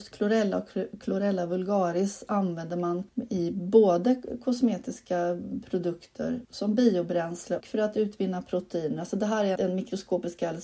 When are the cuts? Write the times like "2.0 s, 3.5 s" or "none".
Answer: 3.1 s, 6.4 s, 7.6 s, 9.6 s